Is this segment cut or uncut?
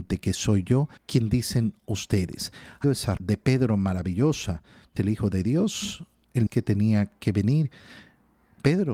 cut